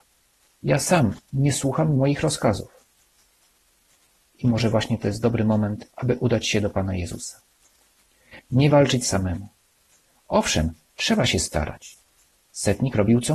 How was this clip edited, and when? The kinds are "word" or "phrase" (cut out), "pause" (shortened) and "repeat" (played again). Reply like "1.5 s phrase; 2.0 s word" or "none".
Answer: 5.9 s pause